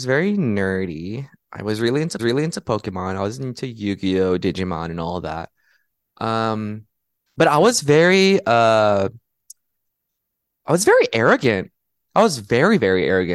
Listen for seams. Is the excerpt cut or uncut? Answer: cut